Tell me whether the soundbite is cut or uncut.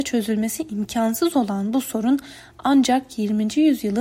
uncut